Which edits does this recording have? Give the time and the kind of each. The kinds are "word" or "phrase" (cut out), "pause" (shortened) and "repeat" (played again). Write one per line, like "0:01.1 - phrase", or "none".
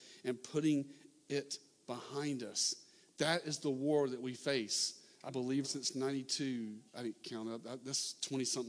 0:05.3 - word
0:05.6 - word
0:06.9 - pause

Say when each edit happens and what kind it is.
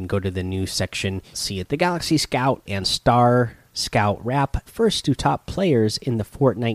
0:01.3 - phrase
0:01.7 - word
0:02.7 - word
0:04.7 - word

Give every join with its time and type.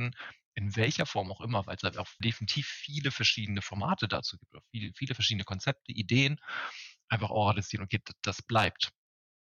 none

